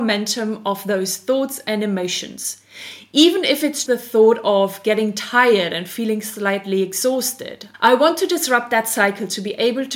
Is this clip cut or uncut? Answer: cut